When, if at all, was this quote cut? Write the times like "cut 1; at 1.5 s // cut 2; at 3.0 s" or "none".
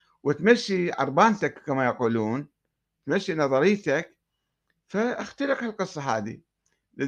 none